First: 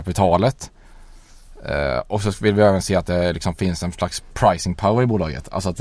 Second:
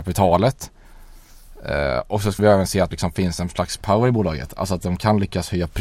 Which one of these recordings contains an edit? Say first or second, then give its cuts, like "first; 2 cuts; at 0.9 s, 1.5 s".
second; 3 cuts; at 2.4 s, 2.9 s, 3.8 s